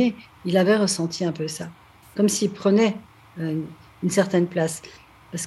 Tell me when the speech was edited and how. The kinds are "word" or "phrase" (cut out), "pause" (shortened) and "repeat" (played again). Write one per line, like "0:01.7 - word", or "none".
none

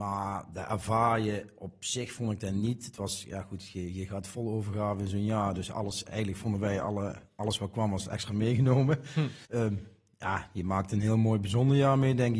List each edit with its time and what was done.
0:09.4 - pause

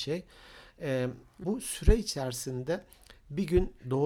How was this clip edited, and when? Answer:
0:01.4 - word

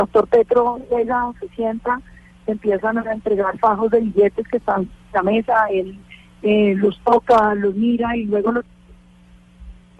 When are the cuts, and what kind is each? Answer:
none

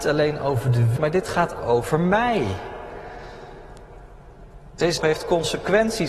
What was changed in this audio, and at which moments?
0:01.0 - word
0:01.6 - word
0:05.0 - word

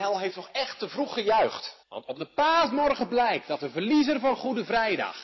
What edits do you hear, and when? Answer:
0:01.8 - pause

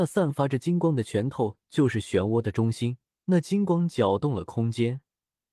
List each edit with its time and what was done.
0:03.1 - pause

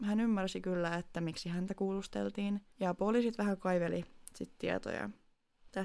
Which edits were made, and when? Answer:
0:02.7 - pause

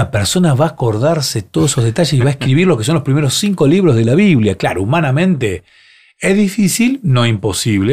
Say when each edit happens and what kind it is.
none

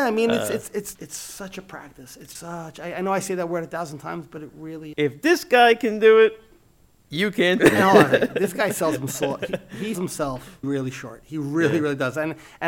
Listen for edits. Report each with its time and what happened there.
0:01.0 - word
0:02.4 - word
0:04.9 - word
0:07.6 - word
0:09.9 - word
0:10.6 - word

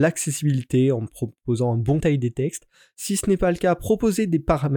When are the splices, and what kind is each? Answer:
0:02.0 - phrase

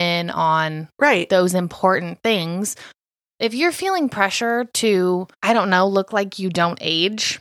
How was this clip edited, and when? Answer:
0:05.3 - pause

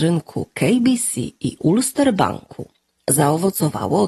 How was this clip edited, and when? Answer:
none

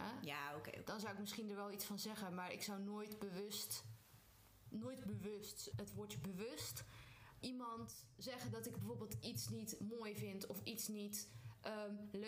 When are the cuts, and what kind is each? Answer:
0:05.7 - word
0:07.4 - word

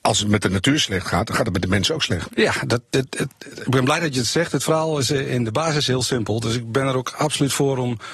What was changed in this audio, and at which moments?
none

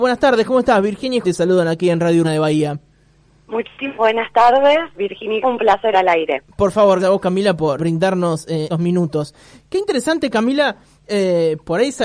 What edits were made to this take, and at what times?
0:01.2 - word
0:02.2 - word
0:04.0 - word
0:04.9 - word
0:05.4 - word
0:05.9 - word
0:07.0 - word
0:07.8 - word
0:08.7 - word

